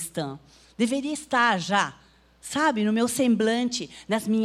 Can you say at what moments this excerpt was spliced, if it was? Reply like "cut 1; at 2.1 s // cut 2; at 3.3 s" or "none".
none